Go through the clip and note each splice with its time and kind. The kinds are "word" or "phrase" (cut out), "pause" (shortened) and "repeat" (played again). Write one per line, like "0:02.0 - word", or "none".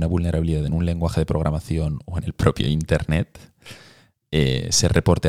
none